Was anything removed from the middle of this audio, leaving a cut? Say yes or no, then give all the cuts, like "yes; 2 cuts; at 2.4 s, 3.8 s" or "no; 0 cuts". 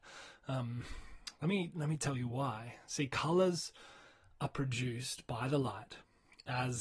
no; 0 cuts